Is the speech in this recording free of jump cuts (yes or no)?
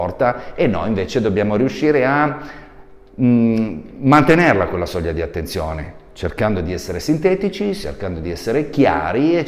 yes